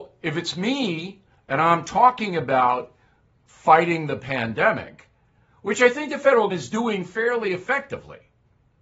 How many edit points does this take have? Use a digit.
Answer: 1